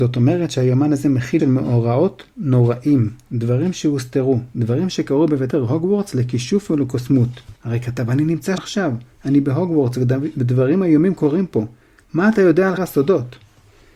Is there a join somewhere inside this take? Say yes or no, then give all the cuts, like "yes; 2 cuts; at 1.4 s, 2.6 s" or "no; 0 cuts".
yes; 5 cuts; at 1.4 s, 5.5 s, 7.6 s, 8.6 s, 12.8 s